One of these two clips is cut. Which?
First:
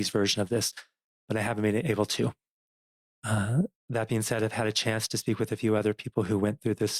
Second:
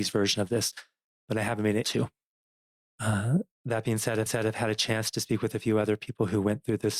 second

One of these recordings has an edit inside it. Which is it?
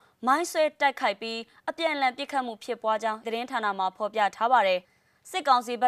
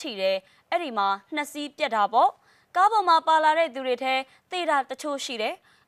first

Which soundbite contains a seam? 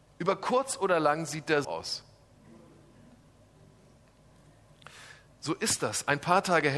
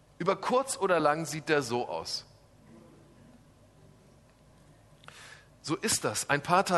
first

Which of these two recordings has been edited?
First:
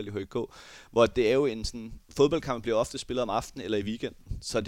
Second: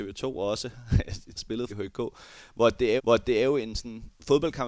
second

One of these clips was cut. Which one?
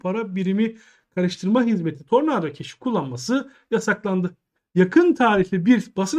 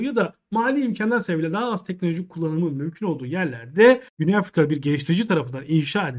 second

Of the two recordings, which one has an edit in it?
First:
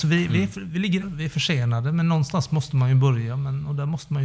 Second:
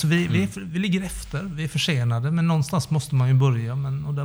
first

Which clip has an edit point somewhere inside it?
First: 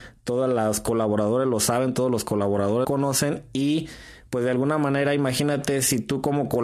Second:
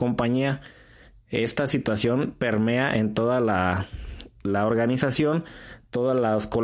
first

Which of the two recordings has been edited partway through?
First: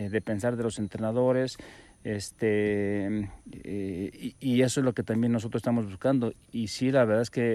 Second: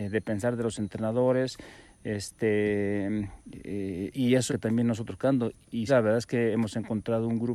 second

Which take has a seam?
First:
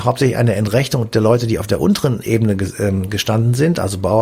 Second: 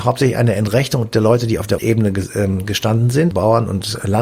second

